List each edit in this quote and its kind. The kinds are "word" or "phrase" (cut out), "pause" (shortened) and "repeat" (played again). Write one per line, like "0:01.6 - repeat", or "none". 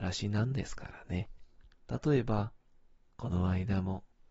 0:01.7 - pause

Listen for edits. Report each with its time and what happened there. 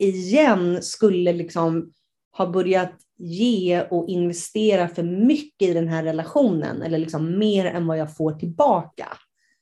none

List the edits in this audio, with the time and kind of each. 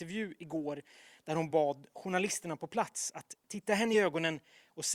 none

